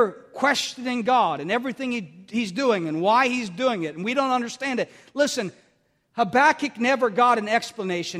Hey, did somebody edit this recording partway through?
no; 0 cuts

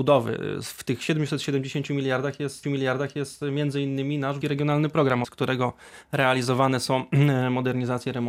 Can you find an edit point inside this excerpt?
yes; 3 cuts; at 2.6 s, 4.4 s, 5.2 s

